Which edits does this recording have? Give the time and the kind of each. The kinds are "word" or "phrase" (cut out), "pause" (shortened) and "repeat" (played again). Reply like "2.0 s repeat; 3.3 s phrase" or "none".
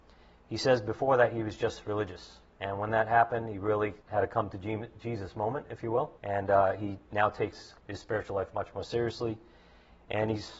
2.5 s pause; 4.0 s pause; 6.2 s pause; 7.8 s pause